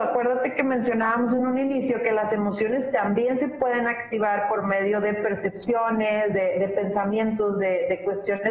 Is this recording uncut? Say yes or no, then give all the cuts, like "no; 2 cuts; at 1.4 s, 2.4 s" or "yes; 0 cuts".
yes; 0 cuts